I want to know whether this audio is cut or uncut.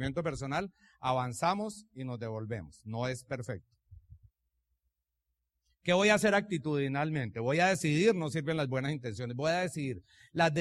uncut